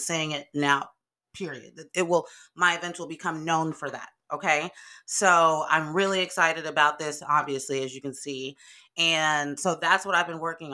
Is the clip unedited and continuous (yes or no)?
yes